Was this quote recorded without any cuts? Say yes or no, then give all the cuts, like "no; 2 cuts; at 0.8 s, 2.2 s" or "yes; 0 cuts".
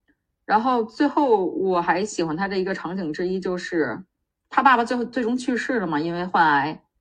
no; 1 cut; at 4.3 s